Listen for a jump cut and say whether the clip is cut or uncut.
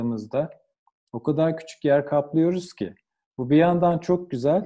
uncut